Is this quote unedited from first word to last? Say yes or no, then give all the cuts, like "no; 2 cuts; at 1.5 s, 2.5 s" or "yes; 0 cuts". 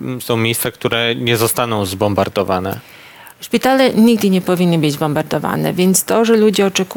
no; 1 cut; at 3.3 s